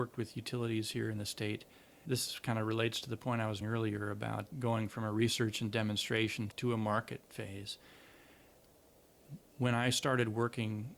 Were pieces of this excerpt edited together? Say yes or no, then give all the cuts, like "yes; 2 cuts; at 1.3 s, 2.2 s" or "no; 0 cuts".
yes; 4 cuts; at 2.0 s, 3.6 s, 4.5 s, 6.5 s